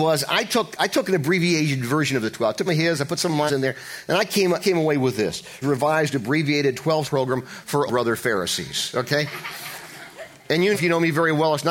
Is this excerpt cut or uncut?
cut